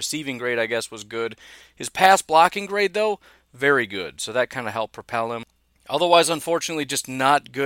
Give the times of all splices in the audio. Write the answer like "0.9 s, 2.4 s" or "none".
none